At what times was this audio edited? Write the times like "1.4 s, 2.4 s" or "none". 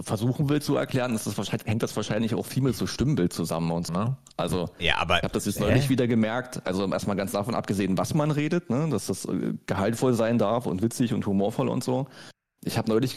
3.9 s